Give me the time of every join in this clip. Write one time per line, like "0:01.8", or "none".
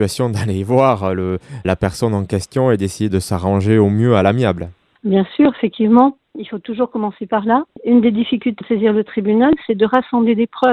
0:01.6
0:03.1
0:08.6